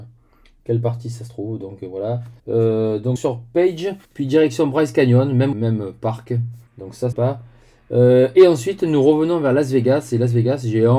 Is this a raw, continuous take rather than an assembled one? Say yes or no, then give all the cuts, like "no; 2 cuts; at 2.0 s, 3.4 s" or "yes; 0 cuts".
no; 6 cuts; at 2.4 s, 3.2 s, 4.0 s, 5.5 s, 6.7 s, 7.1 s